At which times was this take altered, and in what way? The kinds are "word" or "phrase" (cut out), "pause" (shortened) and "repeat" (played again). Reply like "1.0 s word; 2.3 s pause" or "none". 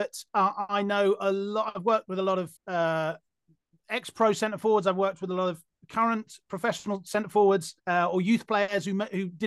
2.6 s pause; 7.8 s pause